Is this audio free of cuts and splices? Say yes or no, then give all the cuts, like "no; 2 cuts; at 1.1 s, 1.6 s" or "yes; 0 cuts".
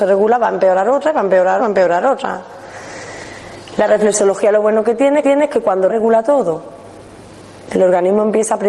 no; 3 cuts; at 1.6 s, 5.2 s, 5.9 s